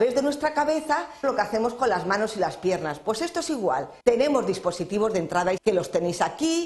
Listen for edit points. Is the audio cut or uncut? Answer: cut